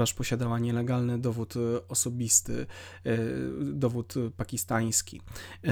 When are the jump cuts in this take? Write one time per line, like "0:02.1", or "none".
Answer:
none